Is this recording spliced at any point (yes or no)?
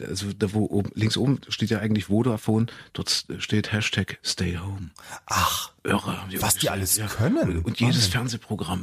no